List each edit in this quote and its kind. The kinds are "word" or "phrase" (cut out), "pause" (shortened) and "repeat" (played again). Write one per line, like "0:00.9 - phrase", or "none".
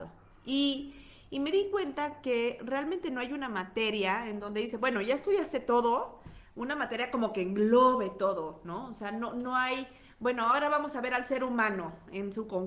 none